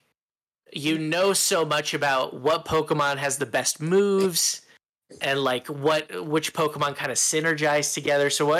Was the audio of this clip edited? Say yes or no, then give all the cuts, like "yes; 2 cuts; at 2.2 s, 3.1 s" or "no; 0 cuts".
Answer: no; 0 cuts